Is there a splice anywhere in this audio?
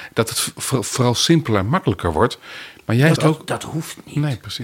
yes; 1 cut; at 3.2 s

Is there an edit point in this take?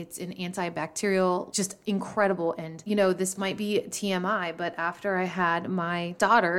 no; 0 cuts

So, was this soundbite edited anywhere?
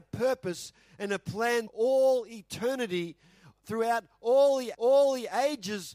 yes; 2 cuts; at 1.7 s, 4.7 s

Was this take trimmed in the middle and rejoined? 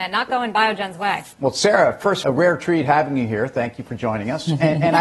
yes; 2 cuts; at 1.3 s, 2.2 s

